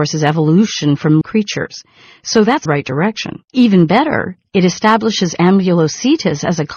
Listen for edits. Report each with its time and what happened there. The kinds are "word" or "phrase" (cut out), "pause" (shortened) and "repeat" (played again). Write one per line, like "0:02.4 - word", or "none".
0:01.2 - word
0:02.7 - phrase
0:03.5 - pause